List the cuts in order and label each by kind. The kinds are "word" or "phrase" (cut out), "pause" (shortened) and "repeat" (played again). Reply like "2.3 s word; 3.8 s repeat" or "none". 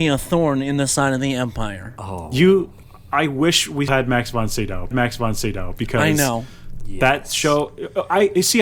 3.9 s word; 4.9 s repeat